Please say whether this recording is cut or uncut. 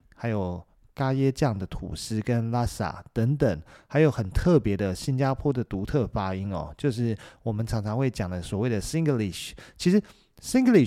uncut